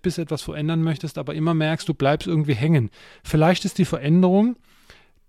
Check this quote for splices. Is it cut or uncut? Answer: uncut